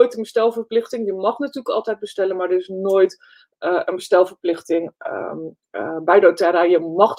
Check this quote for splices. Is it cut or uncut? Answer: uncut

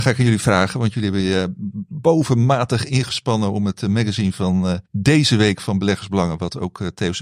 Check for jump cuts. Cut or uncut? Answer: cut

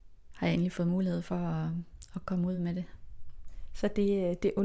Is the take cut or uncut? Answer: uncut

